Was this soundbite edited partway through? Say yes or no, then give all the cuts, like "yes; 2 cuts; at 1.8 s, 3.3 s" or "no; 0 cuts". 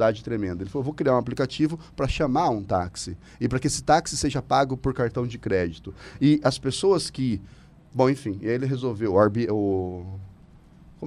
no; 0 cuts